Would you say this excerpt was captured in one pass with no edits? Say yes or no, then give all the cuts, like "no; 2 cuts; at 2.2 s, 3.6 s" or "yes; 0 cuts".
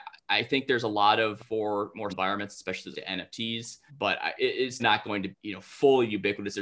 no; 7 cuts; at 1.4 s, 2.1 s, 2.9 s, 3.9 s, 4.4 s, 4.8 s, 5.3 s